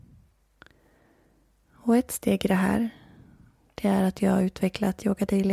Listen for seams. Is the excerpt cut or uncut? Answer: uncut